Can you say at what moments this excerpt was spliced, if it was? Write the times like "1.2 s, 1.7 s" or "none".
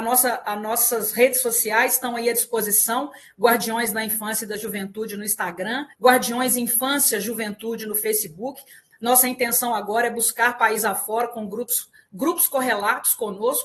5.9 s